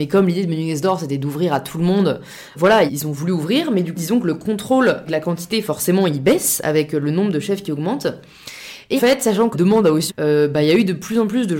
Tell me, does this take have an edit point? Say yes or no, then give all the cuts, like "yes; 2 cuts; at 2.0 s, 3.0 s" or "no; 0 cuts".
yes; 7 cuts; at 2.5 s, 2.9 s, 3.9 s, 5.1 s, 9.0 s, 9.5 s, 10.1 s